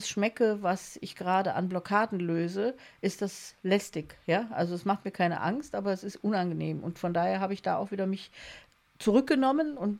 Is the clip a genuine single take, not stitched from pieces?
yes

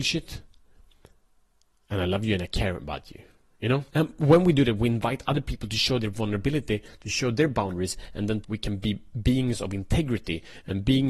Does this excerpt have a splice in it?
yes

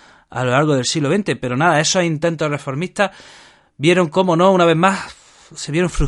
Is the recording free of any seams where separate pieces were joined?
yes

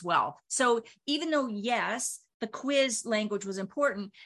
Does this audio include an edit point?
no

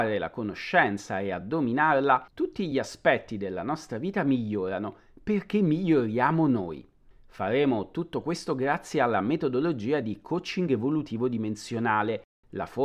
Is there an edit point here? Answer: no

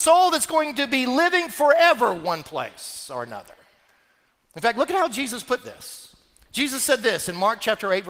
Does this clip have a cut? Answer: no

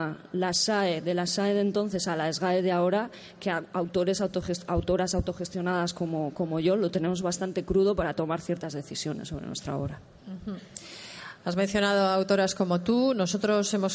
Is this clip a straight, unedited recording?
yes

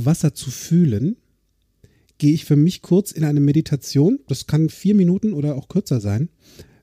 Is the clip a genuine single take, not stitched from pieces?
yes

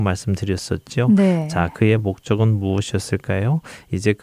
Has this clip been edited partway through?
no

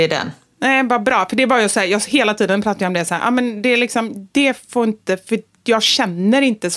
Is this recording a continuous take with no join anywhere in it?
yes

